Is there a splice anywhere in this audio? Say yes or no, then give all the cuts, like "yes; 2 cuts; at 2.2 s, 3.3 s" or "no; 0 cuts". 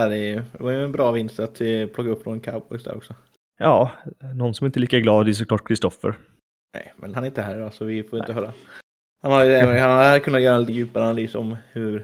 yes; 2 cuts; at 7.1 s, 10.7 s